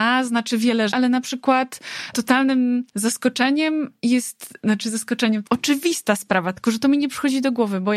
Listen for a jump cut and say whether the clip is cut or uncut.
cut